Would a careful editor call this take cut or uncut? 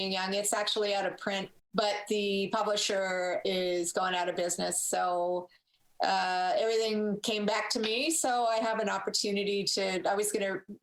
uncut